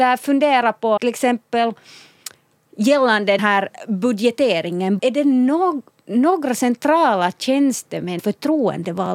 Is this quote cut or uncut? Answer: cut